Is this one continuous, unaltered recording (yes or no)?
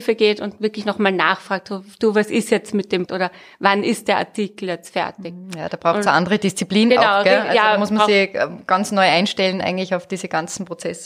no